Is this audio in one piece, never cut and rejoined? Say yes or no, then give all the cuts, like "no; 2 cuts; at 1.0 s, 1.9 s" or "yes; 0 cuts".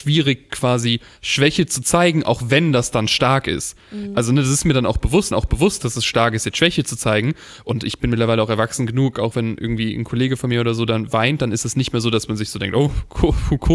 no; 1 cut; at 5.3 s